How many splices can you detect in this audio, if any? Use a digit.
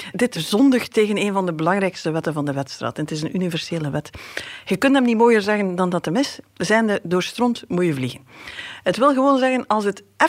0